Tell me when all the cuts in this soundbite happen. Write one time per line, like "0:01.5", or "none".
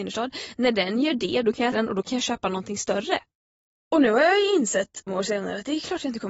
0:01.7
0:05.1

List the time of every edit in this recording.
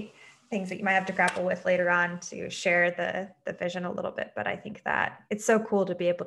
0:05.3

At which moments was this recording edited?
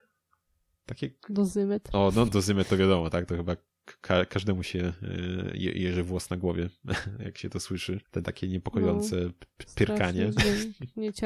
0:02.3
0:08.0

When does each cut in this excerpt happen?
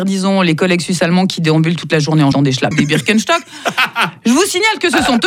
0:02.3
0:02.7

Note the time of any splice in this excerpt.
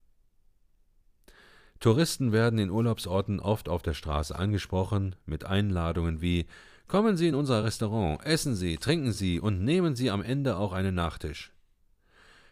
none

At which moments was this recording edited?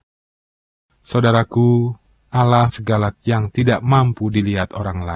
0:02.7
0:03.1

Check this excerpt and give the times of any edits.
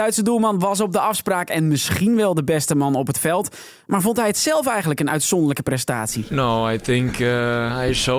none

